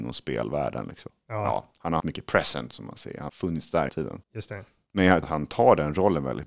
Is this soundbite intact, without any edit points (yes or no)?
no